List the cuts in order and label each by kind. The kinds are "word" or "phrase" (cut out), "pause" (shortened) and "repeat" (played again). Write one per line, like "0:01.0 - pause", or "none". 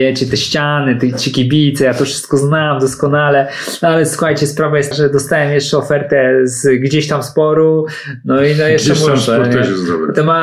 0:04.9 - word